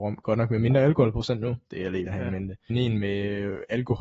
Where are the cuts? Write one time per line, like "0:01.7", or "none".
0:02.1
0:02.7